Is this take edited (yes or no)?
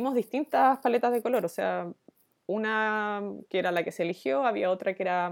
no